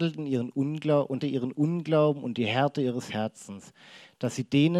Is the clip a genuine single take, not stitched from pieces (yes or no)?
no